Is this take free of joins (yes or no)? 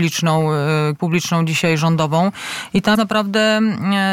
no